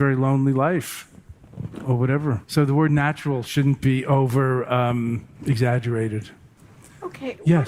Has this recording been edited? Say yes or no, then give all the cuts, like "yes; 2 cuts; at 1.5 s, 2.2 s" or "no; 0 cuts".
yes; 2 cuts; at 2.4 s, 5.4 s